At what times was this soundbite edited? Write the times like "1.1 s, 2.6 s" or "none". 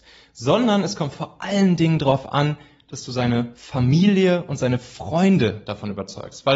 none